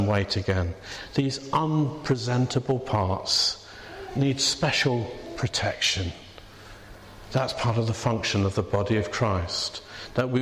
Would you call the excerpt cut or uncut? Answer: uncut